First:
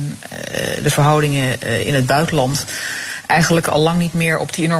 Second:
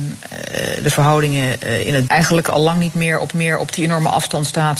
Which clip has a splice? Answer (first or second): second